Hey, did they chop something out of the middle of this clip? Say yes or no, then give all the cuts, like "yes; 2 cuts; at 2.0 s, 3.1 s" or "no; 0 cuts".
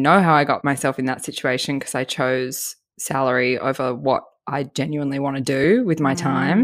no; 0 cuts